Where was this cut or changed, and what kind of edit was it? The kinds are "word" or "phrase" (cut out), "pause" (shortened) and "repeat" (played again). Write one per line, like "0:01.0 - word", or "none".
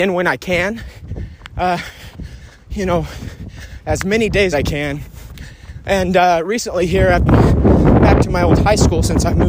0:04.5 - phrase
0:07.3 - phrase

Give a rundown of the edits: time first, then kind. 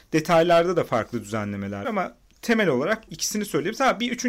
0:01.8 - word
0:03.1 - word

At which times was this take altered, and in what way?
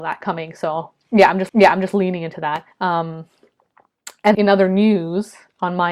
0:01.5 - repeat
0:02.7 - pause
0:04.3 - word

